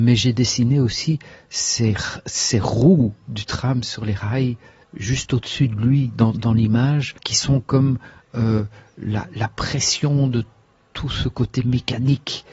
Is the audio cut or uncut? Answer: cut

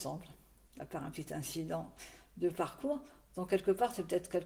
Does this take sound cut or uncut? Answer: uncut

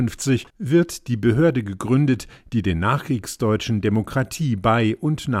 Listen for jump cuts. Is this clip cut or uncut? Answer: uncut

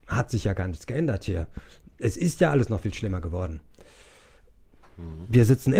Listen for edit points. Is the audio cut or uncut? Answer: uncut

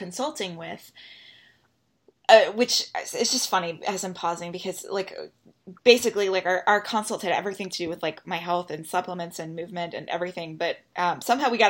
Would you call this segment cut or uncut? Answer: uncut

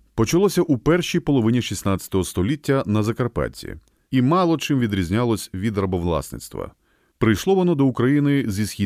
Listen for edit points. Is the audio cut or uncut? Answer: uncut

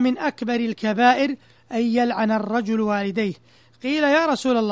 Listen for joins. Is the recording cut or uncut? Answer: uncut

